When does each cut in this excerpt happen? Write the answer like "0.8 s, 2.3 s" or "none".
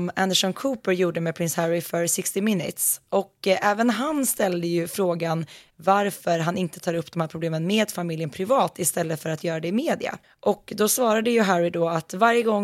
10.2 s